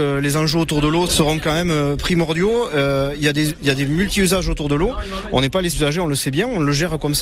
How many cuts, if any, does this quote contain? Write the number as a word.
two